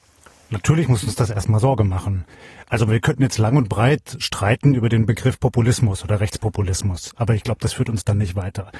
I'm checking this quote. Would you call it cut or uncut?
uncut